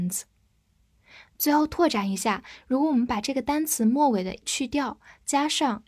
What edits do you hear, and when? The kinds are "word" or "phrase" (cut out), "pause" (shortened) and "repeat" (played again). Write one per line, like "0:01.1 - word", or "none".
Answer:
0:04.4 - word